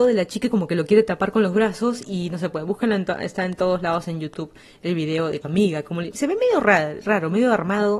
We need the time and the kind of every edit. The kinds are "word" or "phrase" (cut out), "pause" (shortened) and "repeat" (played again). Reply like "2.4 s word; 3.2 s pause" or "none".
5.4 s phrase

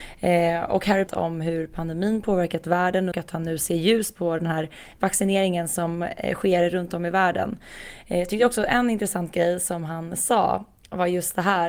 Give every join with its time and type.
1.1 s phrase; 3.1 s phrase

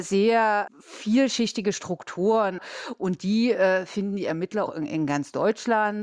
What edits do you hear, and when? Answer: 4.7 s word

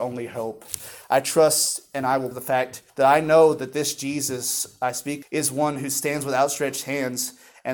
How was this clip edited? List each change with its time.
2.3 s phrase; 2.9 s pause; 5.2 s word

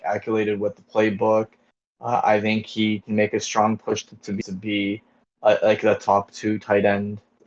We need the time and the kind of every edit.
4.4 s word

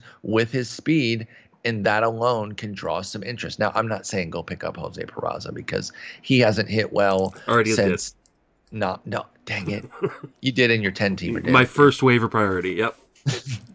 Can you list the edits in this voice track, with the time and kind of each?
10.3 s pause

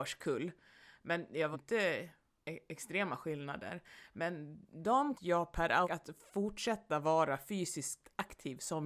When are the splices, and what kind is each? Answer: 1.5 s word; 2.4 s phrase; 5.1 s phrase; 5.8 s phrase

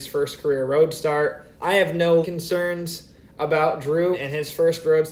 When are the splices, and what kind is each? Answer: 1.5 s pause; 2.2 s word; 4.1 s word

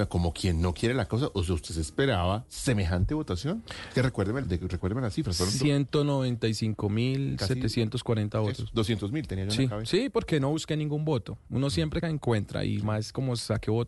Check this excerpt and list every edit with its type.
4.4 s word; 12.0 s phrase

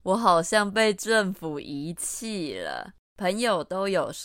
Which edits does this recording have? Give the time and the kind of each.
3.0 s pause

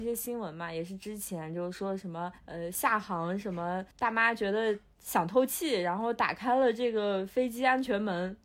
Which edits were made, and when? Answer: 2.4 s pause; 3.9 s pause

